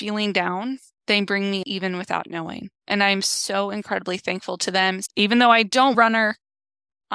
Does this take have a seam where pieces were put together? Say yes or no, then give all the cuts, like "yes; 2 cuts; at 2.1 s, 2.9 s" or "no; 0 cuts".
yes; 4 cuts; at 1.0 s, 1.6 s, 2.8 s, 5.9 s